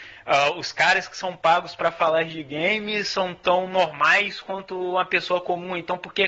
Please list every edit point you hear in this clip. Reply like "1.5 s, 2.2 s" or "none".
none